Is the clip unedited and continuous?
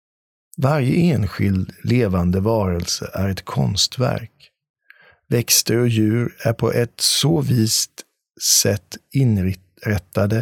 yes; 0 cuts

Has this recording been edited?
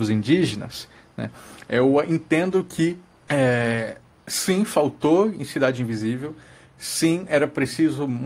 no; 0 cuts

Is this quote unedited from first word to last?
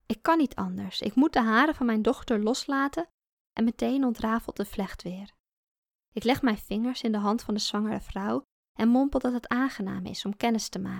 yes; 0 cuts

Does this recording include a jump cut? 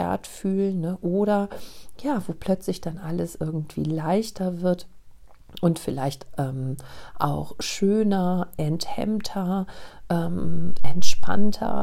no; 0 cuts

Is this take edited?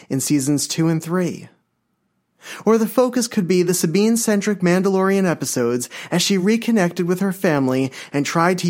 no; 0 cuts

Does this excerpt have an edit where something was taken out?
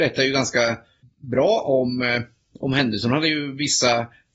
no; 0 cuts

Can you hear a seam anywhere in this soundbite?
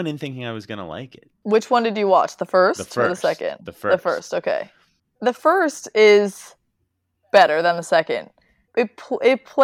no; 0 cuts

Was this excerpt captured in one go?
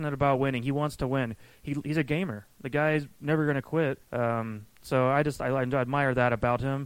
no; 1 cut; at 4.0 s

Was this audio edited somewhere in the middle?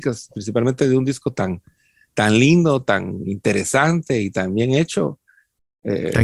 no; 0 cuts

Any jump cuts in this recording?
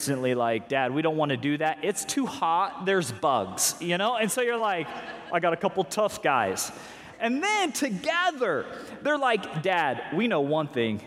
no; 0 cuts

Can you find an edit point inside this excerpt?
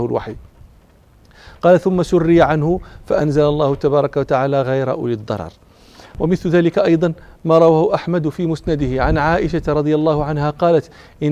no; 0 cuts

